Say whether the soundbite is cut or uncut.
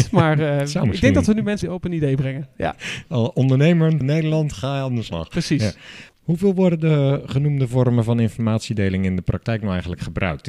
cut